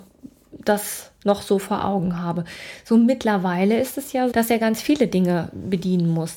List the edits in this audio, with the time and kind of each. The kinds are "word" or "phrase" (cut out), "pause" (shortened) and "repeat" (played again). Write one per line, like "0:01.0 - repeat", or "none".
0:04.3 - word